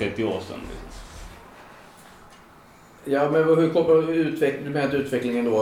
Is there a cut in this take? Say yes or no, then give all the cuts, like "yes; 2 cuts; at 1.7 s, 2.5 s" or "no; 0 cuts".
no; 0 cuts